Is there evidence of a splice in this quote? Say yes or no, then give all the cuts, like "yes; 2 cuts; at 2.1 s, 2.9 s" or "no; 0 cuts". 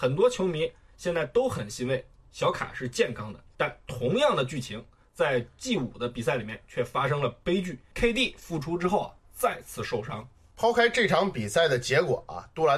no; 0 cuts